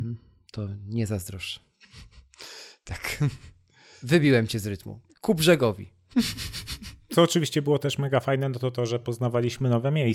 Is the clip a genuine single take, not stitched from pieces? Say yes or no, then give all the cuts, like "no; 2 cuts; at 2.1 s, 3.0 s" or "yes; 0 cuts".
yes; 0 cuts